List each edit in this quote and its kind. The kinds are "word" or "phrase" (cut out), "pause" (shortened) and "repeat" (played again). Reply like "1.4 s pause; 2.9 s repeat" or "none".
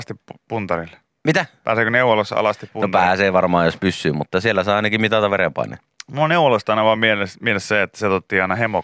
none

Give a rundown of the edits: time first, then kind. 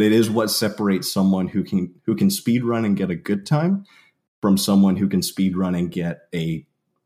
none

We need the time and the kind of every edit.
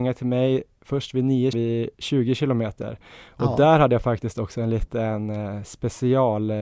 1.5 s phrase; 1.9 s pause

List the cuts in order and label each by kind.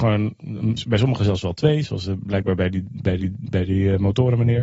3.2 s repeat

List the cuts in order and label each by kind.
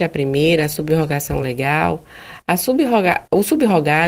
none

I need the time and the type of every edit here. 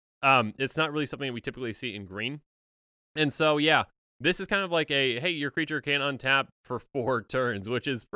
none

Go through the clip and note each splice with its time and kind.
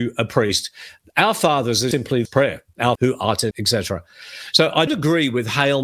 1.9 s word; 2.3 s word; 3.0 s word; 3.5 s word; 4.9 s word

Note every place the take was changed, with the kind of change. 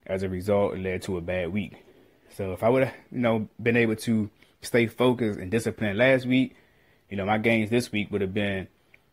none

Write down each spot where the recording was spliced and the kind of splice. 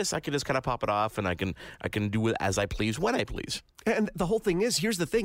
3.7 s pause

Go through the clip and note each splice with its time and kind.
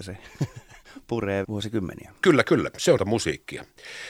1.4 s word; 3.0 s word

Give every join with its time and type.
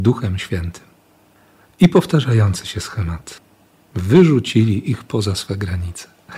none

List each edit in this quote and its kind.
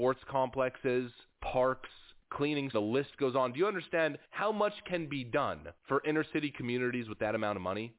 2.7 s phrase

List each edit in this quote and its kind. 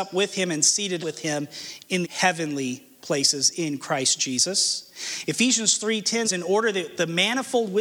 1.0 s word; 2.0 s word; 6.2 s word

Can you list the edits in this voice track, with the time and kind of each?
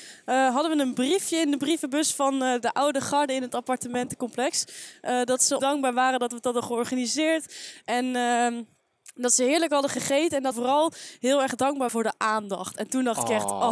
5.6 s word; 10.5 s word; 11.9 s word

